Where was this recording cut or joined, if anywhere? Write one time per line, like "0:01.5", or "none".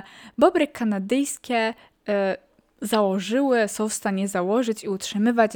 none